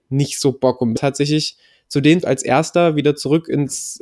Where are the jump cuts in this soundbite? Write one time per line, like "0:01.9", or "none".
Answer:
0:01.0
0:02.2